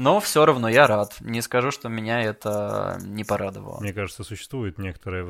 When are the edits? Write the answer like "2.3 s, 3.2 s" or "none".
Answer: none